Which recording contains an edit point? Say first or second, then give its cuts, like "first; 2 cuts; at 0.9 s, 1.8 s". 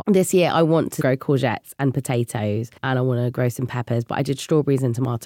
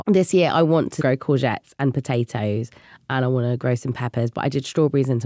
first; 1 cut; at 2.8 s